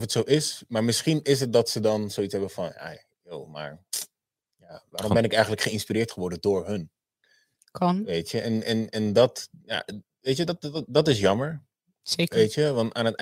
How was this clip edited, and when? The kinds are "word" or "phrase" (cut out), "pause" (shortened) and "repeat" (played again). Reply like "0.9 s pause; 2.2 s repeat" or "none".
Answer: none